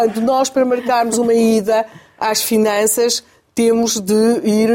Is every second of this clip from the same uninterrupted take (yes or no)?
yes